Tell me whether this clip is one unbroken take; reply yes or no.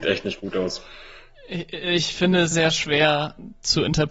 no